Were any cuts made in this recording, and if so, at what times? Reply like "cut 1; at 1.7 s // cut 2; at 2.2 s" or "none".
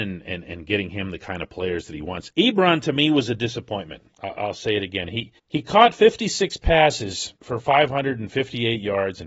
cut 1; at 2.3 s // cut 2; at 4.1 s // cut 3; at 5.4 s // cut 4; at 7.4 s